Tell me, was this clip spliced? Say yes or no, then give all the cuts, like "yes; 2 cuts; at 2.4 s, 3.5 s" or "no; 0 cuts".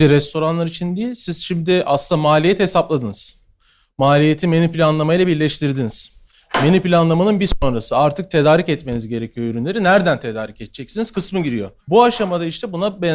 yes; 1 cut; at 11.8 s